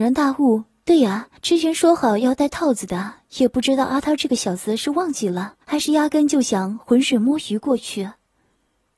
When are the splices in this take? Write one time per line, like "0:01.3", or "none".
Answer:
0:01.4
0:05.6